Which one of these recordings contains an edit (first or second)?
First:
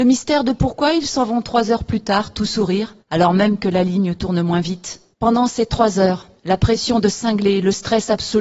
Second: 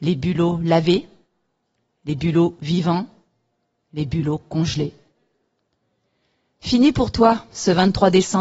first